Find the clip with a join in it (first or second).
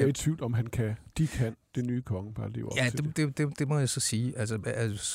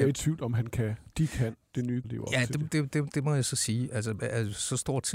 second